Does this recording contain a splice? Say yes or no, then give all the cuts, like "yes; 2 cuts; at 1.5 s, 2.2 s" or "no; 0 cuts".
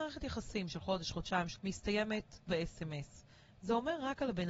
yes; 2 cuts; at 1.6 s, 2.5 s